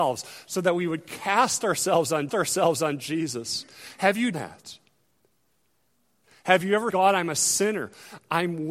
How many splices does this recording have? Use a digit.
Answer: 3